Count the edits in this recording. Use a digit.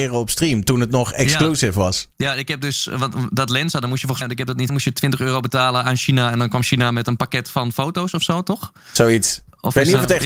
3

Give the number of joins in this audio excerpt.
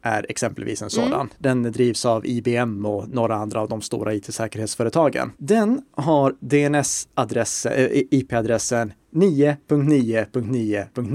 1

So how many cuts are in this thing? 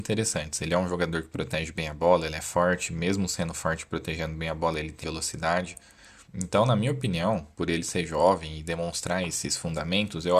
3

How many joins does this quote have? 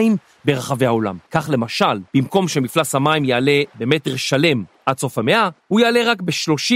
3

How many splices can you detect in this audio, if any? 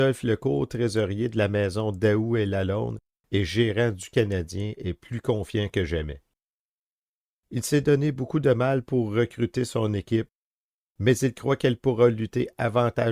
0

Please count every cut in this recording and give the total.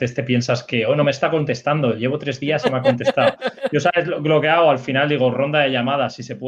0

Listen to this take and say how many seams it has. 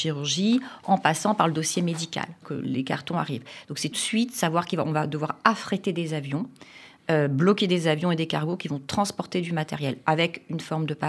2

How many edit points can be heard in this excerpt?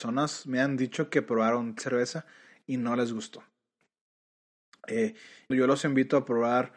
2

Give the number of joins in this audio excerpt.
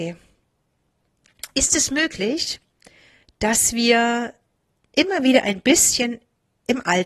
0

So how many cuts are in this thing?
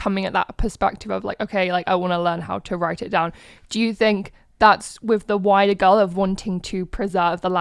0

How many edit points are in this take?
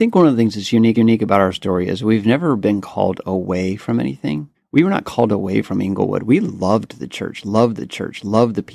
3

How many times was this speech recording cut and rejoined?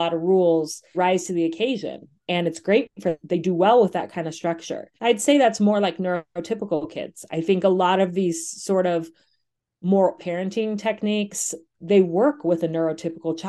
4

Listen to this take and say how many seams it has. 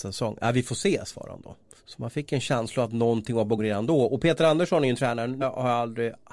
3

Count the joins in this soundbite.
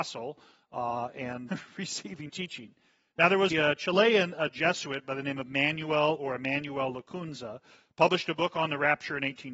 3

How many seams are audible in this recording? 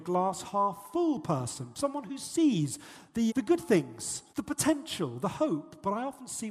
2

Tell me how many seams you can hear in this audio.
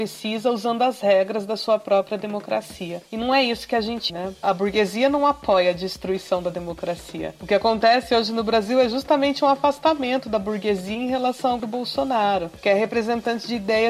2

